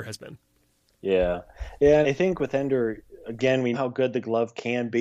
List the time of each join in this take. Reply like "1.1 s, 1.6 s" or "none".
2.0 s, 3.7 s